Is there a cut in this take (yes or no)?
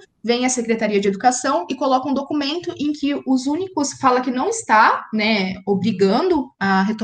no